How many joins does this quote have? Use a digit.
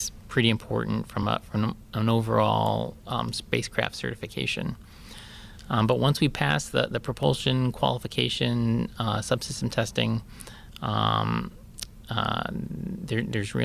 0